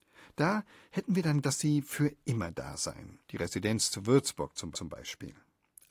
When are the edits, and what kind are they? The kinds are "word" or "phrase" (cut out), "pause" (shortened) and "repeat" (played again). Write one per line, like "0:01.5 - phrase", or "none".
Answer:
0:01.4 - word
0:03.2 - pause
0:04.7 - repeat